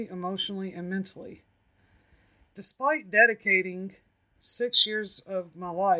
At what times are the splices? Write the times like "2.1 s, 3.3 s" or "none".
none